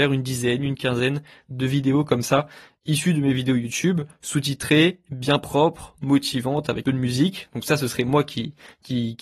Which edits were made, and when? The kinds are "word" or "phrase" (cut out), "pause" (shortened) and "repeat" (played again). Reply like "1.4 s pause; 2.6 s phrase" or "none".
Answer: 6.8 s phrase

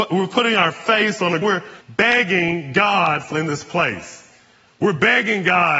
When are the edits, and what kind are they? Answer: 1.4 s word; 1.8 s pause; 3.3 s word

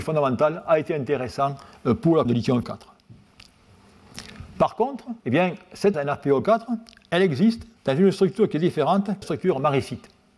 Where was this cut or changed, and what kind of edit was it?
2.2 s word; 2.6 s word; 5.2 s pause; 5.9 s word; 7.8 s pause; 9.2 s phrase

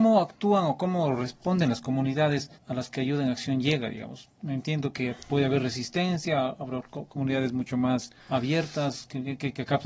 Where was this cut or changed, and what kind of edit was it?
2.6 s pause; 8.2 s pause

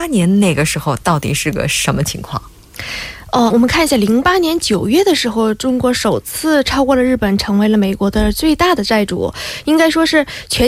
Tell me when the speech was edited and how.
3.5 s word

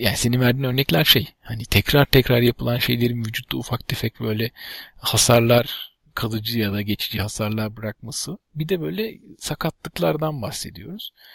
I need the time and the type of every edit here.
none

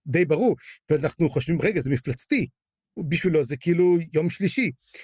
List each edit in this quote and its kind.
none

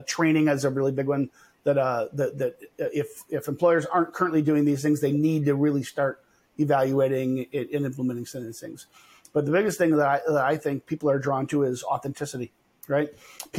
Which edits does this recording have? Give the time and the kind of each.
none

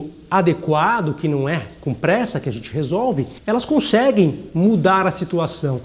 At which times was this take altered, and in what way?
3.4 s pause

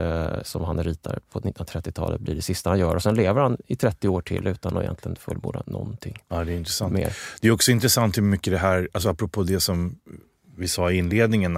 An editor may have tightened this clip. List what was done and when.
none

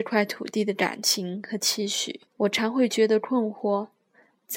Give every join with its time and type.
2.3 s pause

